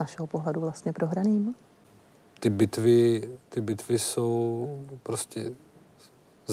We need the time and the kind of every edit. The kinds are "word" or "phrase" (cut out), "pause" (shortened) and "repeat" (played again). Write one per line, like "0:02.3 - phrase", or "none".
none